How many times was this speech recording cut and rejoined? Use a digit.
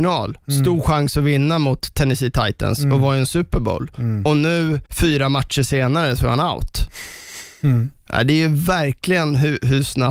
1